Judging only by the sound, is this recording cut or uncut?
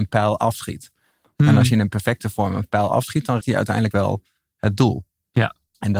cut